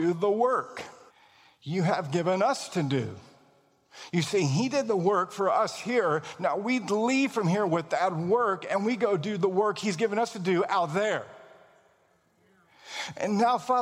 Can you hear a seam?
yes; 1 cut; at 1.1 s

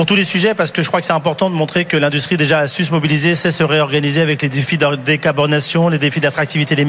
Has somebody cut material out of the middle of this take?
no; 0 cuts

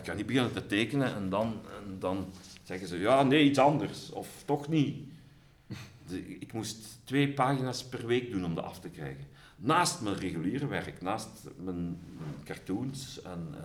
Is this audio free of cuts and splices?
yes; 0 cuts

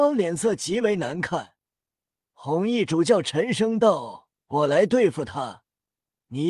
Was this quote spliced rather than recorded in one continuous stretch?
no; 0 cuts

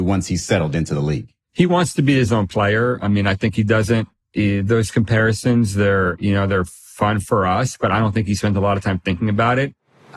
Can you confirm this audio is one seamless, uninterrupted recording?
no; 1 cut; at 1.4 s

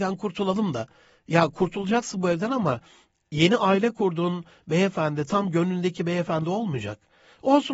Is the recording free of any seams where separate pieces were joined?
yes; 0 cuts

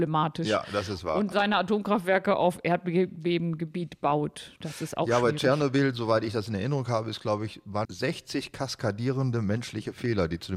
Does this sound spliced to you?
yes; 2 cuts; at 1.3 s, 7.8 s

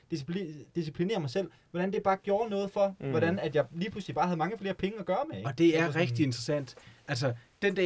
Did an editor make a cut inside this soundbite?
no; 0 cuts

